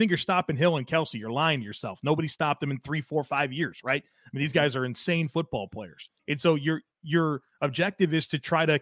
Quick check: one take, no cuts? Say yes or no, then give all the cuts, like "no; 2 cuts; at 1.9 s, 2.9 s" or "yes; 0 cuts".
no; 1 cut; at 6.2 s